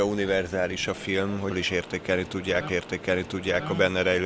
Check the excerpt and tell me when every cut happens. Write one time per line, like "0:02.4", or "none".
0:01.5
0:02.7

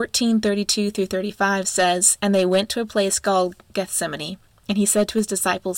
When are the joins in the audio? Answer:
none

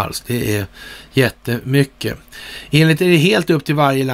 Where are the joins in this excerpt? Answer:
0:03.0

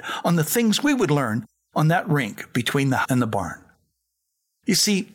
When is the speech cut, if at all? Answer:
0:03.0

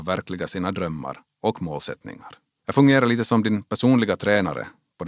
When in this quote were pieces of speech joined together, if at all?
0:02.5

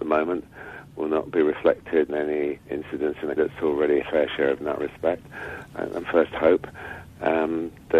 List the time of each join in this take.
0:02.1
0:02.6
0:03.4
0:04.0
0:04.6
0:06.0

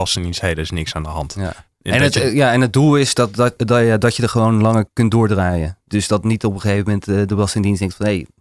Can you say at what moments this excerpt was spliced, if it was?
none

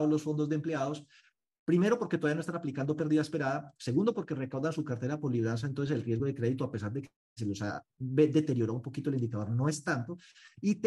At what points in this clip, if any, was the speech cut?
none

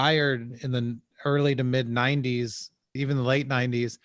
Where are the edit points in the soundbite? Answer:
0:03.0

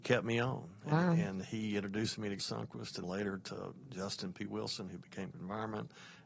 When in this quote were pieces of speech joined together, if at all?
0:02.4
0:03.0
0:05.3

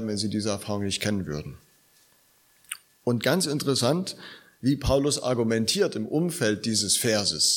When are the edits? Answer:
none

